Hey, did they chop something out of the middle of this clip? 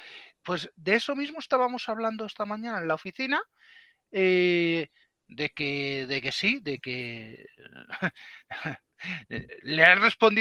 no; 0 cuts

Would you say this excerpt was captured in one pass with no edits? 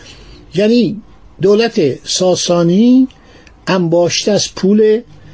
yes; 0 cuts

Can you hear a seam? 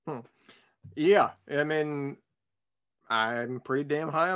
no; 0 cuts

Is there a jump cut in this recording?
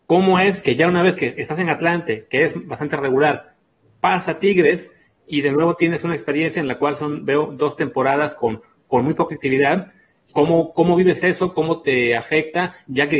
no; 0 cuts

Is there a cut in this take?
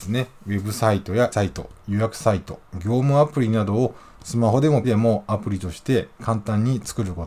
yes; 2 cuts; at 1.3 s, 4.8 s

